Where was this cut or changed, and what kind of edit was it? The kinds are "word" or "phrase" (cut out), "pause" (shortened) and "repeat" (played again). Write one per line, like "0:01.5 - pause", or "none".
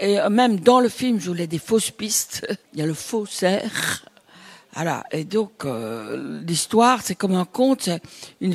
0:02.6 - pause